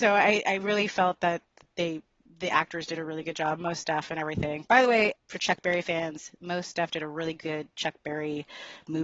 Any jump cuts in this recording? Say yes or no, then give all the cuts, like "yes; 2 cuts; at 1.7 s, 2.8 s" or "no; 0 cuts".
no; 0 cuts